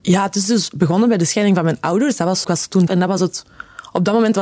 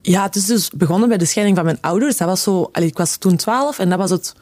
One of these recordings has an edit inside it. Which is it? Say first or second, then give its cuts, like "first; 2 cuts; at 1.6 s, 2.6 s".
first; 2 cuts; at 2.4 s, 2.9 s